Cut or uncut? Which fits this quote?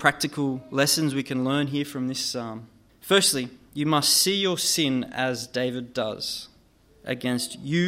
cut